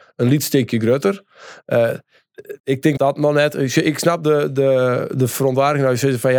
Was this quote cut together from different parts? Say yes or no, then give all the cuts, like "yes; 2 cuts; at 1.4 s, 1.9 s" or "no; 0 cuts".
yes; 2 cuts; at 2.6 s, 3.0 s